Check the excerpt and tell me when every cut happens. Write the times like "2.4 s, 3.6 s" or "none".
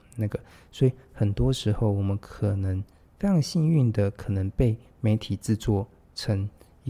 none